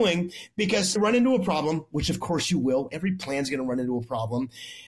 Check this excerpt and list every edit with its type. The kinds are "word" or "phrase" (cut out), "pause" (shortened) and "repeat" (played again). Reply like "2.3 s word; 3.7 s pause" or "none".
1.0 s phrase